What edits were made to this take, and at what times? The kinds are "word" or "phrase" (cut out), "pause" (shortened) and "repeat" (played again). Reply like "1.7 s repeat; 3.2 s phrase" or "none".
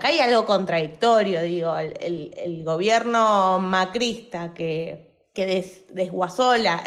none